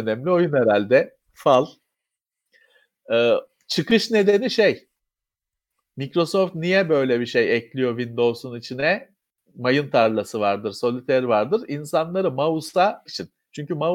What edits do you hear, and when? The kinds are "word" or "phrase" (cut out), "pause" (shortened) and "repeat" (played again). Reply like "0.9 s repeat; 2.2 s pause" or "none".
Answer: 13.1 s word